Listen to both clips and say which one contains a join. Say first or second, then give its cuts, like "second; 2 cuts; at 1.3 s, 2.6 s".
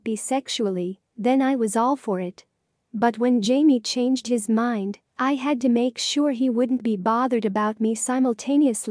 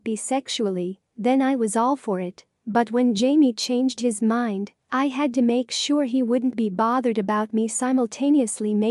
second; 1 cut; at 2.6 s